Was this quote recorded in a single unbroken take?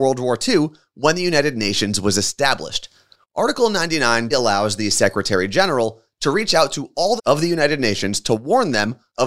no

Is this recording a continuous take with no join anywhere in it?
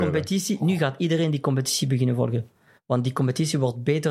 yes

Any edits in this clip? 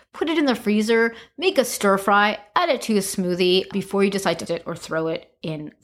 yes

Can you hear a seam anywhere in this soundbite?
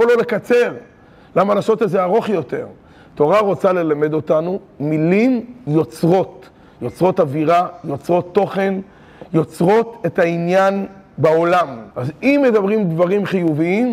yes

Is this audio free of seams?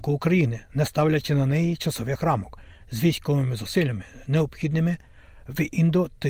yes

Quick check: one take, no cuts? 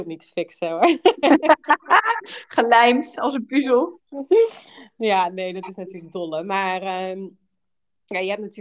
yes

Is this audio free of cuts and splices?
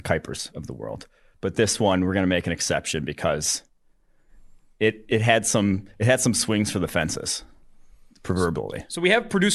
yes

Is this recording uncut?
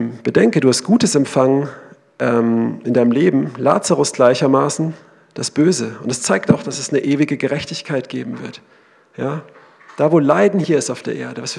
yes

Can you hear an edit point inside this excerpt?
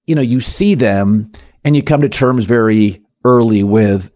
no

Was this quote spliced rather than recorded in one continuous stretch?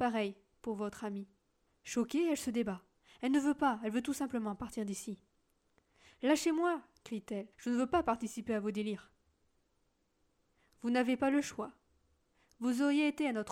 yes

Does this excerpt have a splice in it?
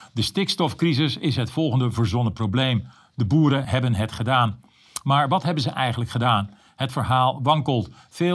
yes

